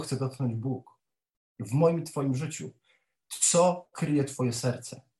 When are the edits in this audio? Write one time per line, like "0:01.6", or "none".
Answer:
none